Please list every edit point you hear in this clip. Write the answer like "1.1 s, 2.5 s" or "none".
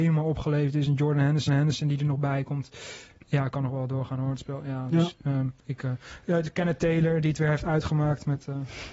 1.5 s, 5.6 s